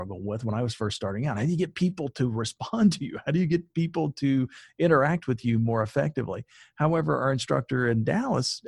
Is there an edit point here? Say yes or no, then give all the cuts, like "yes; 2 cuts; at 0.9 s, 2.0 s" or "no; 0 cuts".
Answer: no; 0 cuts